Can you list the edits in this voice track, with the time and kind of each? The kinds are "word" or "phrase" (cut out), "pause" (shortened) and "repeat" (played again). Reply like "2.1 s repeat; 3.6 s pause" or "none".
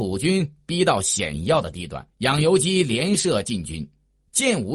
2.1 s pause